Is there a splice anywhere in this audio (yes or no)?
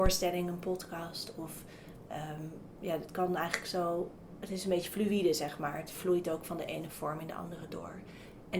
no